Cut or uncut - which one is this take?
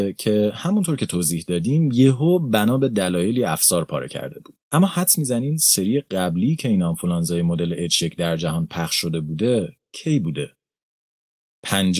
cut